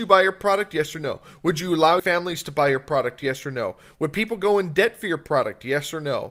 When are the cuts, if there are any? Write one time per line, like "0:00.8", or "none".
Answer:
0:02.0

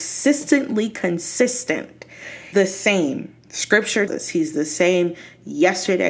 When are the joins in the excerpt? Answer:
0:02.5
0:04.1

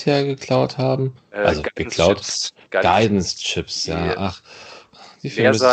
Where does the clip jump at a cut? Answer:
none

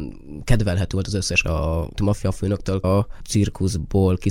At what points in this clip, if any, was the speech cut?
0:01.4
0:02.0
0:02.8

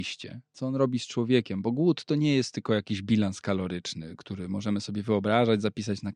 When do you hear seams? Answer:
none

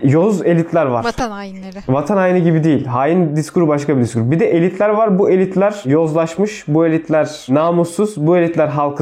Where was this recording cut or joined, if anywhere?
none

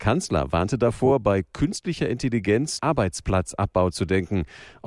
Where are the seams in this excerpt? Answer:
0:02.8

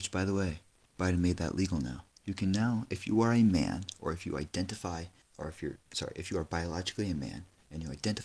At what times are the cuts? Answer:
0:02.1
0:05.2

